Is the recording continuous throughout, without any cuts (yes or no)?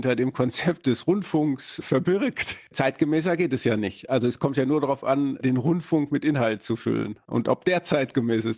yes